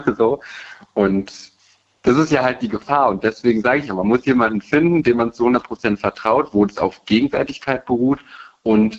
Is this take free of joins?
yes; 0 cuts

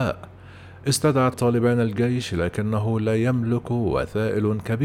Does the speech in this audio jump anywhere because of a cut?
yes; 1 cut; at 1.3 s

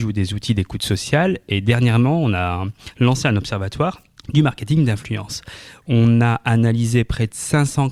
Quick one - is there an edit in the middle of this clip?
no; 0 cuts

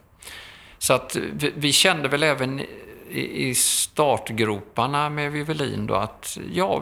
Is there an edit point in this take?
no; 0 cuts

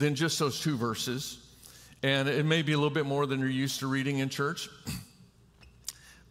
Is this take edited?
no; 0 cuts

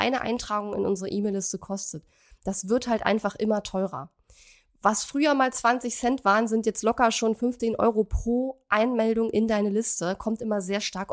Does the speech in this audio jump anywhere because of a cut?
yes; 1 cut; at 7.6 s

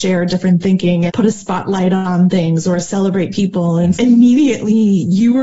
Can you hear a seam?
yes; 3 cuts; at 1.1 s, 3.3 s, 3.9 s

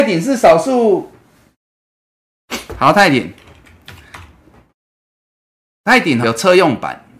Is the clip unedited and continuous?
no; 1 cut; at 6.2 s

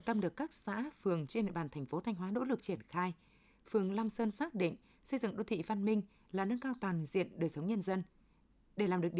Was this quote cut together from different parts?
no; 0 cuts

